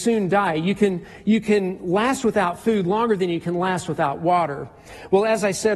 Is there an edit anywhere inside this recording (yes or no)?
no